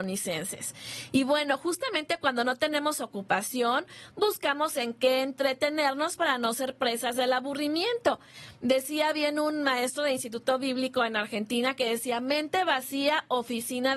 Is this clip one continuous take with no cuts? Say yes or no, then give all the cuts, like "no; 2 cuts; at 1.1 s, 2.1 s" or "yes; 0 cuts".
yes; 0 cuts